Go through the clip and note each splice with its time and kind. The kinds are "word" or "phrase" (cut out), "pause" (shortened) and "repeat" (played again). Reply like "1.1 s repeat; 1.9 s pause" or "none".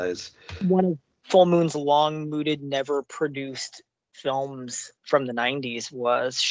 5.0 s word